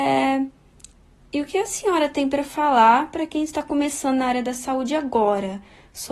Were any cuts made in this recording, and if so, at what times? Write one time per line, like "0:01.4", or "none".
none

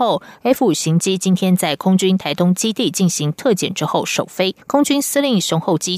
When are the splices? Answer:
0:04.6

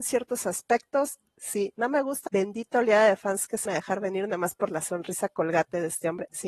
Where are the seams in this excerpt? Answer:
0:02.3
0:03.7

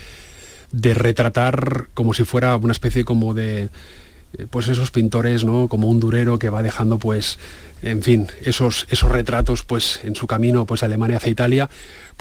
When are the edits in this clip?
none

